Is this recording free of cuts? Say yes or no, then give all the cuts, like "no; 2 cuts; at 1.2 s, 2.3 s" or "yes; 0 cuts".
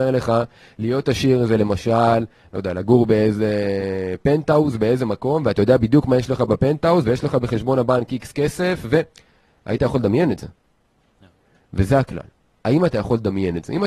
yes; 0 cuts